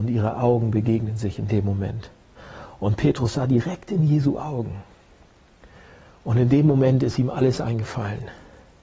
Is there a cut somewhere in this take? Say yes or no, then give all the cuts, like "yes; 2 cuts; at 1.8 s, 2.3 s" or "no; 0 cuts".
no; 0 cuts